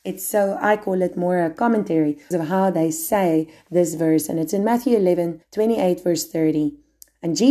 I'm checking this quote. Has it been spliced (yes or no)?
yes